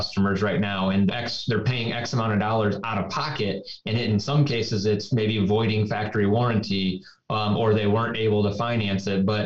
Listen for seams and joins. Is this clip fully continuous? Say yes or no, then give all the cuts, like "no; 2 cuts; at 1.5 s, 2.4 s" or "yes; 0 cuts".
no; 1 cut; at 1.1 s